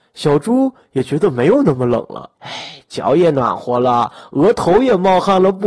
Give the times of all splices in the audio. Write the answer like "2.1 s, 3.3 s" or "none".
2.4 s